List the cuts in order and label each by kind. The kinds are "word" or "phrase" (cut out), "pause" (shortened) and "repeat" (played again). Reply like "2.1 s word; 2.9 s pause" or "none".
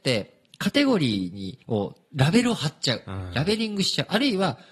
1.6 s pause